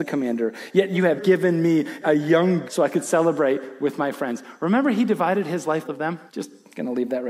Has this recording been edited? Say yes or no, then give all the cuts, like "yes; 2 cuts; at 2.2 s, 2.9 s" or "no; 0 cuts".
yes; 5 cuts; at 1.2 s, 2.0 s, 2.7 s, 5.8 s, 6.3 s